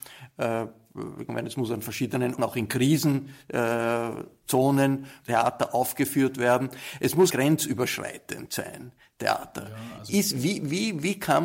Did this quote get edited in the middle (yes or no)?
yes